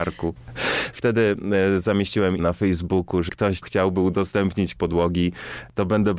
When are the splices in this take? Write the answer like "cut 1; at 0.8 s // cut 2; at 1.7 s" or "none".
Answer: cut 1; at 2.4 s // cut 2; at 3.3 s // cut 3; at 3.6 s // cut 4; at 4.8 s